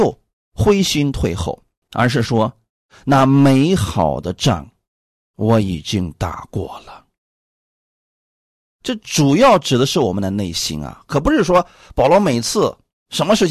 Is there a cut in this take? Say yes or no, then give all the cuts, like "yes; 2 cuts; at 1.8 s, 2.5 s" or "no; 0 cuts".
yes; 1 cut; at 1.8 s